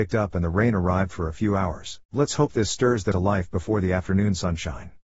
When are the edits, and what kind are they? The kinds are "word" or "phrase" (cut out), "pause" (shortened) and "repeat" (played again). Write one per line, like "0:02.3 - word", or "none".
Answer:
0:02.0 - pause
0:03.1 - word